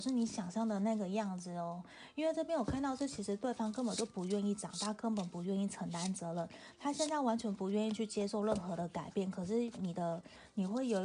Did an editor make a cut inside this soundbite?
no; 0 cuts

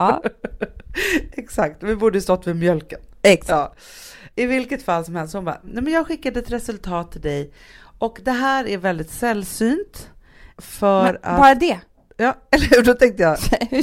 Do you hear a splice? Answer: no; 0 cuts

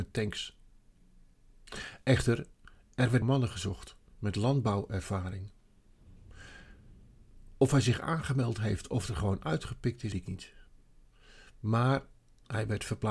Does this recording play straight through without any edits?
no; 2 cuts; at 3.2 s, 10.1 s

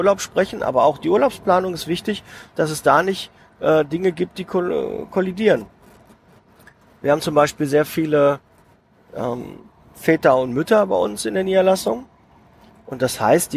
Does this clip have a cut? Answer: no; 0 cuts

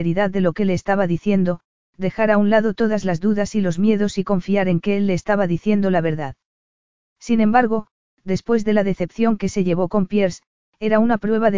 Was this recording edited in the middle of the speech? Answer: no; 0 cuts

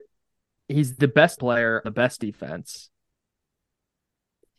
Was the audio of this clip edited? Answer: yes; 2 cuts; at 1.4 s, 1.8 s

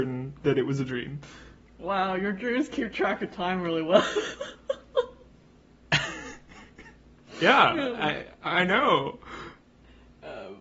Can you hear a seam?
no; 0 cuts

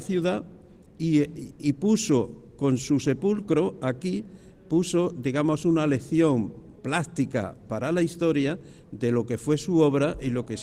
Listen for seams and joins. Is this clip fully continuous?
no; 1 cut; at 6.8 s

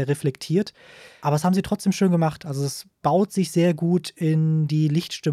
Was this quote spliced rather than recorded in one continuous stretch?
no; 0 cuts

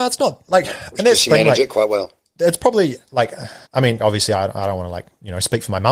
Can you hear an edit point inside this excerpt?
yes; 2 cuts; at 3.7 s, 4.0 s

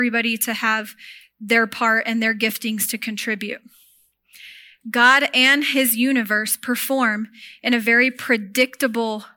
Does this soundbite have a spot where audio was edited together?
no; 0 cuts

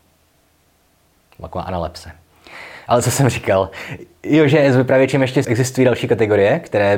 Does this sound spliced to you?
yes; 1 cut; at 5.4 s

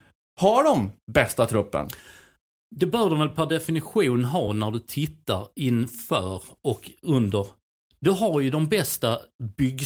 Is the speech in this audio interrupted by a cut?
no; 0 cuts

